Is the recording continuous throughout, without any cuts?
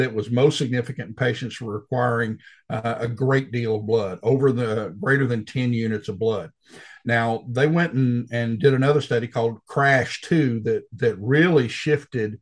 yes; 0 cuts

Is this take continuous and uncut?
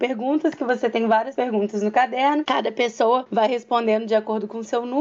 yes; 0 cuts

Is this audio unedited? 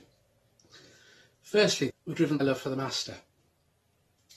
no; 2 cuts; at 1.9 s, 2.4 s

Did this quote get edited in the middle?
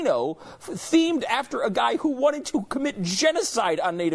no; 0 cuts

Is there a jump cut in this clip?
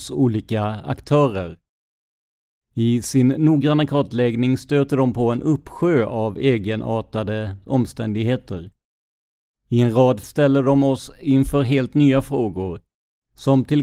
yes; 1 cut; at 10.2 s

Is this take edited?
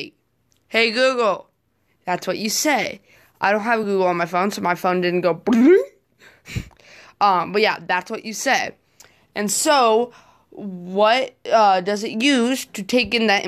no; 0 cuts

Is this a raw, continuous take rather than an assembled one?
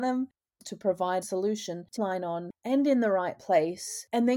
no; 2 cuts; at 1.2 s, 2.0 s

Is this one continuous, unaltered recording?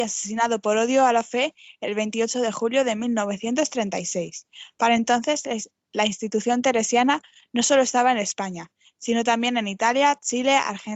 yes; 0 cuts

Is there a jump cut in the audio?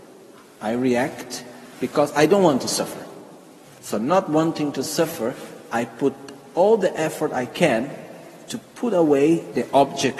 no; 0 cuts

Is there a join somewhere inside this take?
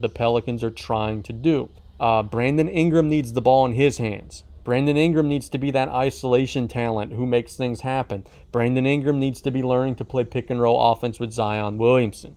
yes; 2 cuts; at 1.8 s, 4.6 s

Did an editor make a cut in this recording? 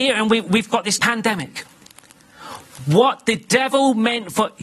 yes; 1 cut; at 1.0 s

